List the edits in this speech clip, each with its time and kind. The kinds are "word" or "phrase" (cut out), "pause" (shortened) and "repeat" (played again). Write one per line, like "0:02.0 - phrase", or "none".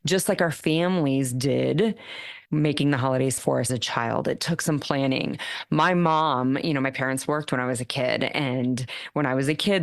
0:02.5 - pause
0:03.4 - word
0:03.7 - word